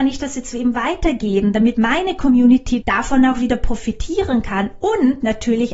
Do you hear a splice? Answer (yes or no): yes